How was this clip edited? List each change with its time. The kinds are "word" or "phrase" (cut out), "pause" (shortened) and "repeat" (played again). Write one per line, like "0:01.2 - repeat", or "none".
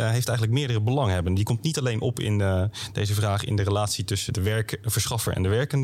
0:04.3 - word